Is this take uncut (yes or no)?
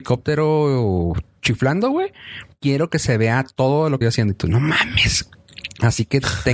no